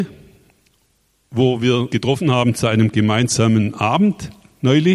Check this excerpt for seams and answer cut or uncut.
cut